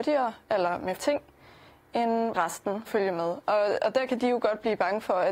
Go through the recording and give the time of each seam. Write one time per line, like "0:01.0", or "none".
0:01.0
0:02.3
0:02.9